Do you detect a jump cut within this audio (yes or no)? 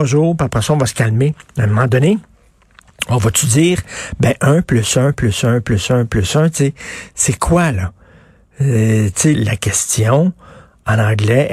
yes